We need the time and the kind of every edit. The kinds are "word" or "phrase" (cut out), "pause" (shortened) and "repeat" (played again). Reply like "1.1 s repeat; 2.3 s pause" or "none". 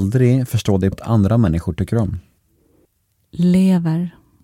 0.9 s word